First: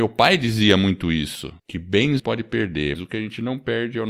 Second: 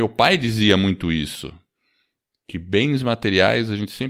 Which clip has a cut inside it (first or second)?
first